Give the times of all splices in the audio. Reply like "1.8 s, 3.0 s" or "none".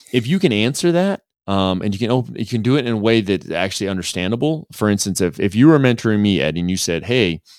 1.3 s